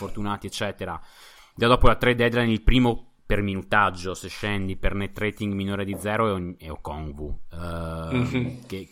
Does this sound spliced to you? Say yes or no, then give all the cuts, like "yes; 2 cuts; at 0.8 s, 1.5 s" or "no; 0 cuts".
no; 0 cuts